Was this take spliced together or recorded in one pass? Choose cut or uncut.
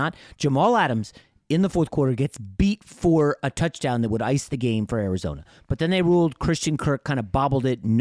uncut